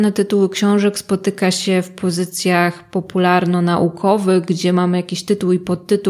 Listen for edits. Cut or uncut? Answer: uncut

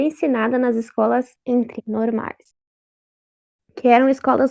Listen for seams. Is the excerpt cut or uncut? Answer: cut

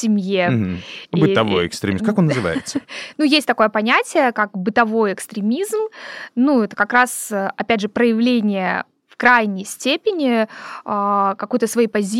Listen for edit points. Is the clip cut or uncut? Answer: uncut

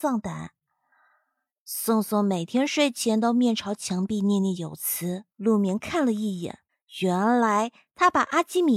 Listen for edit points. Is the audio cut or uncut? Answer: cut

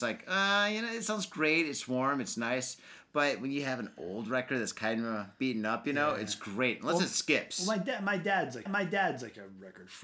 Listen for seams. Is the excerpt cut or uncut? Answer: cut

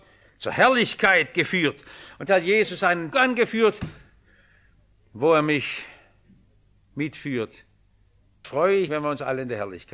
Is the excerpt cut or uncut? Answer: cut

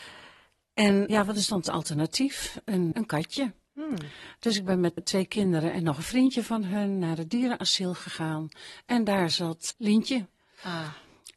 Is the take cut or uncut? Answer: cut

